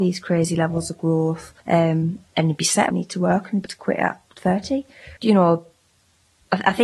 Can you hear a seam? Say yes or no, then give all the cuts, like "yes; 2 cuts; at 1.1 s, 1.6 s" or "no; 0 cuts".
yes; 5 cuts; at 1.6 s, 2.9 s, 3.7 s, 4.3 s, 5.2 s